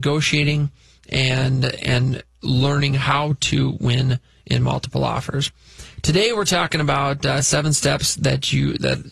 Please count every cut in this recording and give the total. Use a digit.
0